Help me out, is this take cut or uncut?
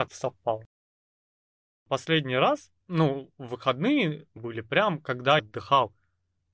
cut